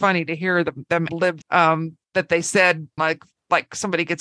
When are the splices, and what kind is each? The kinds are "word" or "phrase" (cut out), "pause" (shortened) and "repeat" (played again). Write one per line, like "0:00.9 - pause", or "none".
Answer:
0:01.1 - word
0:01.4 - word
0:02.0 - pause
0:03.0 - word